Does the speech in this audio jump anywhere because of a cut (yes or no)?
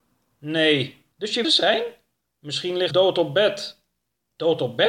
yes